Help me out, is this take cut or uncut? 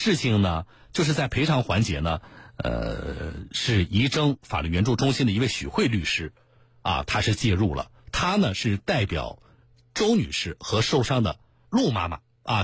uncut